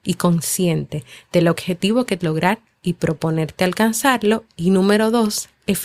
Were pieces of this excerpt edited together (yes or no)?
yes